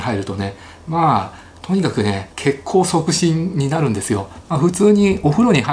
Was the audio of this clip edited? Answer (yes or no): yes